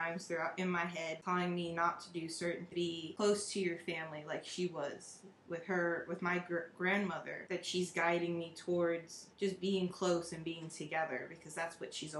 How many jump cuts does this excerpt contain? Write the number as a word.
two